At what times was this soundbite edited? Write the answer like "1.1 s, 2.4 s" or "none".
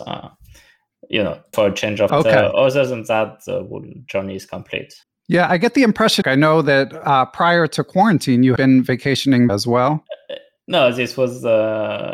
1.5 s, 2.1 s, 5.0 s, 6.2 s, 8.6 s, 9.5 s